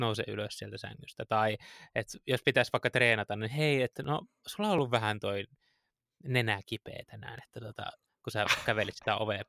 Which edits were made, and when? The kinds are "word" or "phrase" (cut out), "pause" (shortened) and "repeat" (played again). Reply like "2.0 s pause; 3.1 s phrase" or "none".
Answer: none

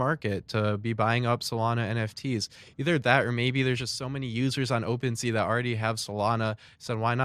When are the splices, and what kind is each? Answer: none

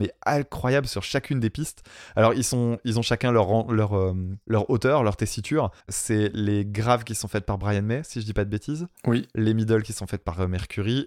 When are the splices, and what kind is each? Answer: 5.8 s pause

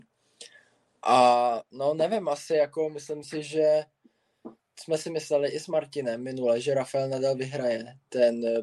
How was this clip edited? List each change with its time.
none

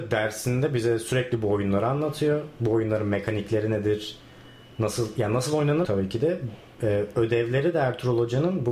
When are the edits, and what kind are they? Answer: 5.8 s word

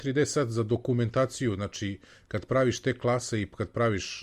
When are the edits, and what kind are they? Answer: none

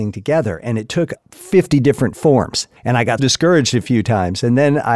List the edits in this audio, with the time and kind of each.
1.2 s word; 2.8 s pause; 3.2 s word

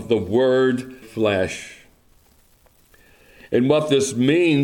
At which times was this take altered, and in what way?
1.0 s word

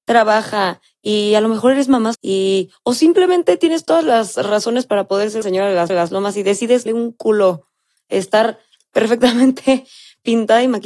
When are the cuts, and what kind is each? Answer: 2.1 s word; 5.4 s word; 5.9 s repeat; 6.9 s phrase

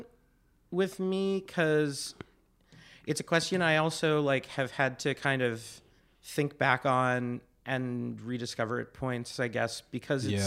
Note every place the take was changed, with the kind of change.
6.0 s pause

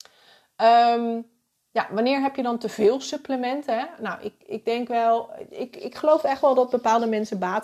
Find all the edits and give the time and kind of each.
1.5 s pause

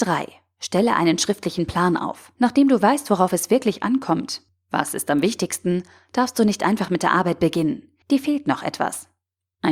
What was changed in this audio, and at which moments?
2.4 s pause; 8.0 s pause

